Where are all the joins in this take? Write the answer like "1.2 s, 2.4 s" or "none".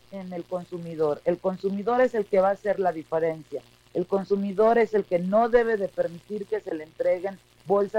none